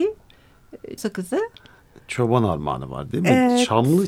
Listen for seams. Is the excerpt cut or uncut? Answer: cut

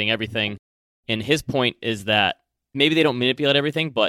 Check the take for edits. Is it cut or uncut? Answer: cut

